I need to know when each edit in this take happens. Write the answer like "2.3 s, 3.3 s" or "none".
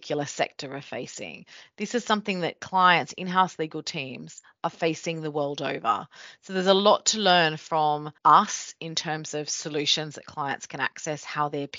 8.2 s

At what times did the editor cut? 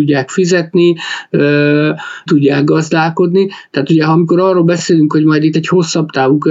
2.3 s, 5.5 s

